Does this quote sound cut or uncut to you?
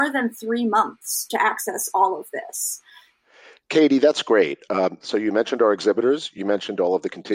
uncut